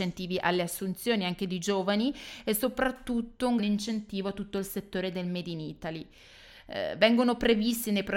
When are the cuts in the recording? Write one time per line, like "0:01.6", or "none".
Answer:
0:03.6